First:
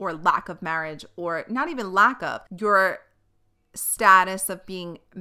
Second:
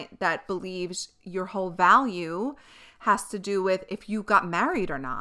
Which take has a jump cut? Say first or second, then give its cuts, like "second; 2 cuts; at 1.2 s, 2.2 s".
first; 1 cut; at 2.5 s